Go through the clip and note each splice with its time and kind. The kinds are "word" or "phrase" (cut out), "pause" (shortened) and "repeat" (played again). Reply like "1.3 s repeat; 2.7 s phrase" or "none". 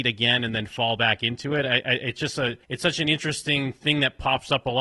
2.6 s pause